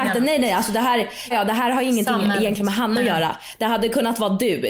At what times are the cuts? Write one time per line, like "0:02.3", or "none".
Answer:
0:01.3